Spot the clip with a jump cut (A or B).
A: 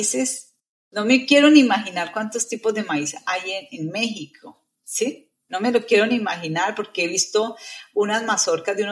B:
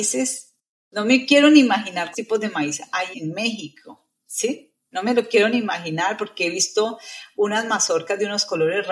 B